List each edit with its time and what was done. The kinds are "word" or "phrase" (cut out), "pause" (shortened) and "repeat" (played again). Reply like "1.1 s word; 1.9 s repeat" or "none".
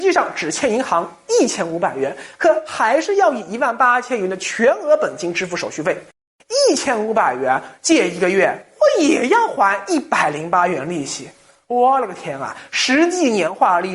none